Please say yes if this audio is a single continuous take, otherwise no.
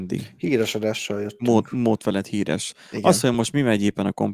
yes